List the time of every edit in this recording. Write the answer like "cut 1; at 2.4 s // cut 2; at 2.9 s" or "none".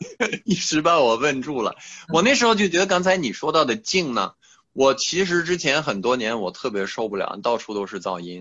none